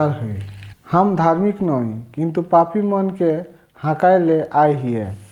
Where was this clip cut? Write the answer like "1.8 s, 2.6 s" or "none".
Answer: none

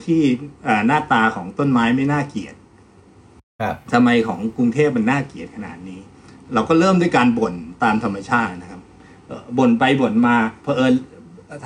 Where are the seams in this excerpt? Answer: none

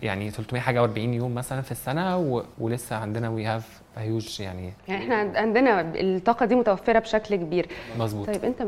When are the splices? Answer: 2.5 s, 4.8 s

